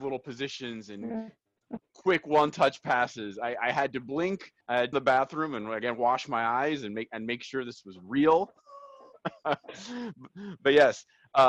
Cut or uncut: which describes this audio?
cut